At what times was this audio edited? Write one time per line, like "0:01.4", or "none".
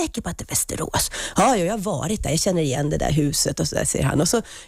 none